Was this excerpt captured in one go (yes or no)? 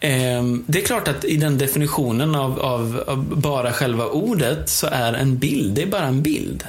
yes